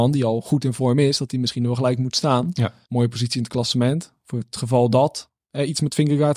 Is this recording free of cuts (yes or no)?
no